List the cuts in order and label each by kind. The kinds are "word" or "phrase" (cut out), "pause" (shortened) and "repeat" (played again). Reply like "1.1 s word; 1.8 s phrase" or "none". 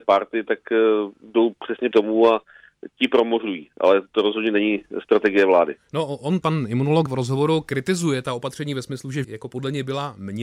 1.9 s word; 6.4 s word; 7.1 s word; 9.2 s word

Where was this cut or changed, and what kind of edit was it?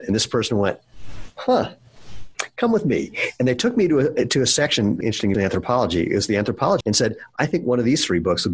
5.0 s phrase; 5.3 s word; 6.8 s word

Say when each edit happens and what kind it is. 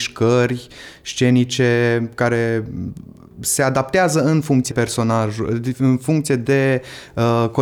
4.7 s word

